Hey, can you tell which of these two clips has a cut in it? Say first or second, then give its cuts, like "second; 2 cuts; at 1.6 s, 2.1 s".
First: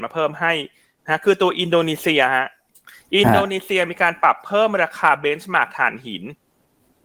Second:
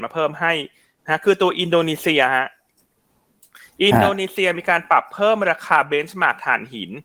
first; 1 cut; at 2.7 s